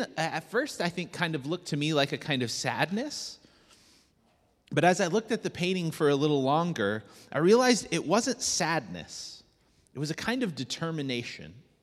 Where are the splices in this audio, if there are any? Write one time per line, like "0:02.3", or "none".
none